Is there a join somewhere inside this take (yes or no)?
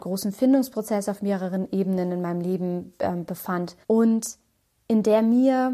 yes